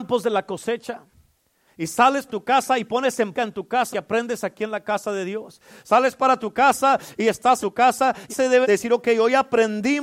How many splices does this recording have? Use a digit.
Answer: 6